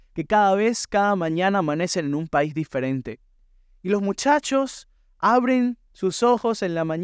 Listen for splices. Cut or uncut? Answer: uncut